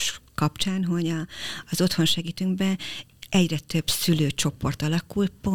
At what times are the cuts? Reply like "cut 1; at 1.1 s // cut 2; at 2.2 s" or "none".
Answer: none